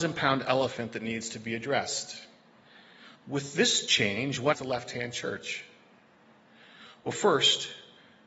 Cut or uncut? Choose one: cut